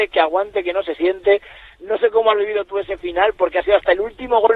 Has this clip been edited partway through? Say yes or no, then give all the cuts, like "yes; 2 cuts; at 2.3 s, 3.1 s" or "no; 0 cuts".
no; 0 cuts